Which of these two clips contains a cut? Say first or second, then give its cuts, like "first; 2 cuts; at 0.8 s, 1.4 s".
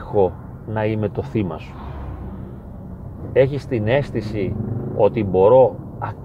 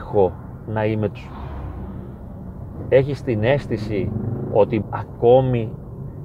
second; 2 cuts; at 1.1 s, 4.8 s